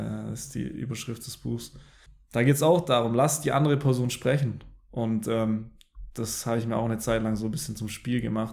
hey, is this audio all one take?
yes; 0 cuts

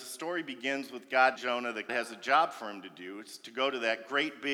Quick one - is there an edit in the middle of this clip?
yes; 2 cuts; at 1.4 s, 1.9 s

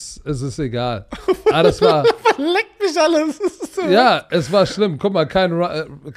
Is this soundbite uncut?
yes; 0 cuts

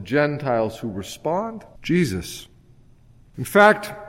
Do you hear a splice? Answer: yes; 1 cut; at 1.8 s

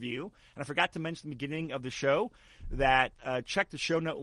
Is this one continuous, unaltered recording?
yes; 0 cuts

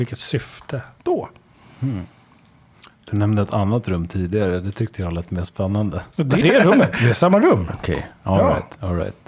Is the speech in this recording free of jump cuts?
no; 1 cut; at 6.4 s

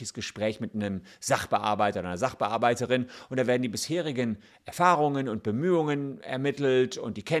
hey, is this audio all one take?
yes; 0 cuts

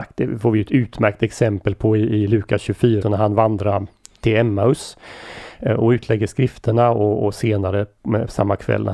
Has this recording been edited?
yes; 1 cut; at 3.0 s

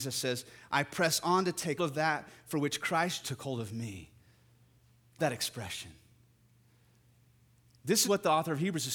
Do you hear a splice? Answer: yes; 4 cuts; at 1.8 s, 3.2 s, 5.2 s, 8.0 s

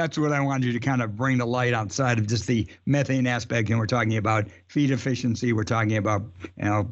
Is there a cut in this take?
no; 0 cuts

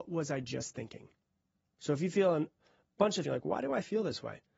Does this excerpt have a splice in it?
yes; 1 cut; at 3.2 s

